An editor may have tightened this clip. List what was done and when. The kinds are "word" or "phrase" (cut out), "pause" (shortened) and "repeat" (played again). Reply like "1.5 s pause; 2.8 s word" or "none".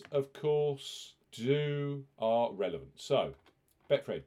1.2 s pause